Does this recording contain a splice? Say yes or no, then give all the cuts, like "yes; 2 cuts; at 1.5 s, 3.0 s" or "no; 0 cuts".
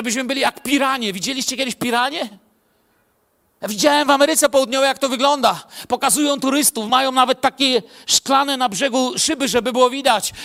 no; 0 cuts